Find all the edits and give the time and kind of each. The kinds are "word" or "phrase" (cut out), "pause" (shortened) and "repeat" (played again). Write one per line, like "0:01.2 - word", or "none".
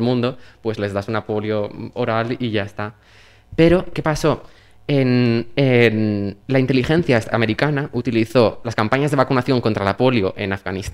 0:03.9 - word
0:06.4 - pause
0:08.6 - phrase